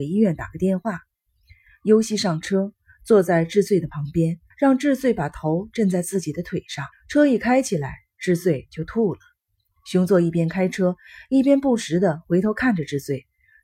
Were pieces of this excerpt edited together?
yes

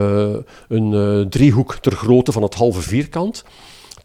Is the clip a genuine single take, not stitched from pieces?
yes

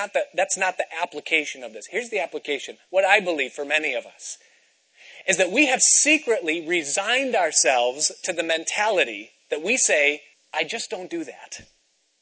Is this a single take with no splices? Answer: no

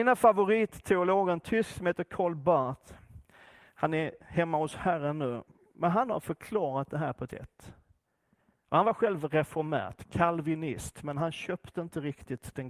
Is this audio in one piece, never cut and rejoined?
no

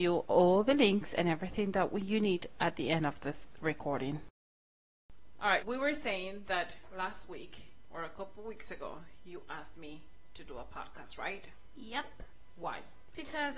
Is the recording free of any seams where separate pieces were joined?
no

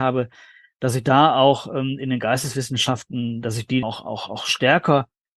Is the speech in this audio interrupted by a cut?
yes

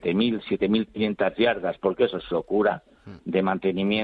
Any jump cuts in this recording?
yes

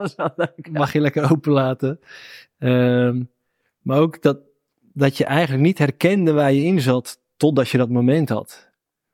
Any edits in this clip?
no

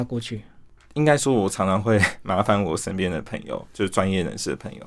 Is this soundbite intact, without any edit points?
yes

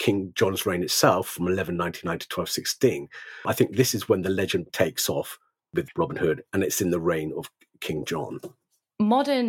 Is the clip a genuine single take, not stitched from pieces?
no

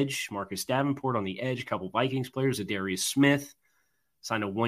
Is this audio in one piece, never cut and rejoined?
yes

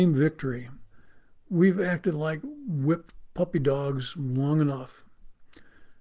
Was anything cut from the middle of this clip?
no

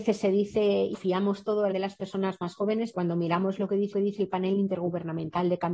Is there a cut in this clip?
yes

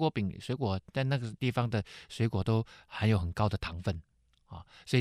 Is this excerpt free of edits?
yes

